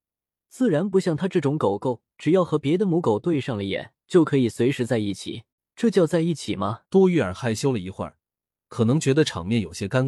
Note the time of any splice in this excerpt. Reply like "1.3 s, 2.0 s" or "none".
2.1 s, 4.0 s, 5.5 s, 6.8 s